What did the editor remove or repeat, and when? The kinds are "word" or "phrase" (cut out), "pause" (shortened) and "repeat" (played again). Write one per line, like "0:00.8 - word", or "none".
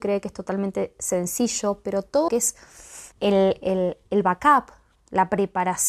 0:02.3 - word
0:03.1 - pause